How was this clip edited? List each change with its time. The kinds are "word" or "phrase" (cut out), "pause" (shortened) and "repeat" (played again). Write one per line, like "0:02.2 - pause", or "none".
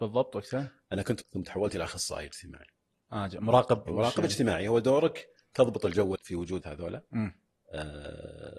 0:01.2 - word
0:03.9 - word
0:06.2 - word
0:06.6 - word